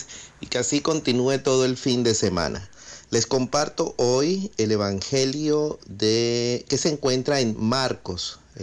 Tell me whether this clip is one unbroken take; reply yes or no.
yes